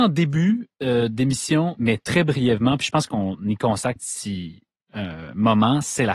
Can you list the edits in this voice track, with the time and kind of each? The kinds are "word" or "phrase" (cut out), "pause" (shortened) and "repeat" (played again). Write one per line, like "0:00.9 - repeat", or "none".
0:01.8 - word
0:03.1 - phrase
0:04.0 - word